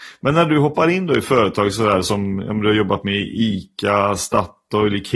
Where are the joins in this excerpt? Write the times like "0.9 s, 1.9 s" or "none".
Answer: none